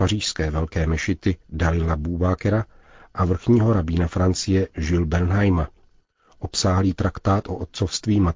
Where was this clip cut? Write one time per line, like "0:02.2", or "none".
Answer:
none